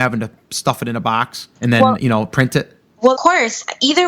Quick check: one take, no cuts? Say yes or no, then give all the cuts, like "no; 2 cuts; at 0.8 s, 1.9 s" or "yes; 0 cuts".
no; 2 cuts; at 1.6 s, 3.1 s